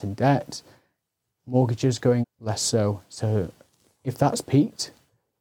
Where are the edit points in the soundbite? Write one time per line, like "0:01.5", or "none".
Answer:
0:02.2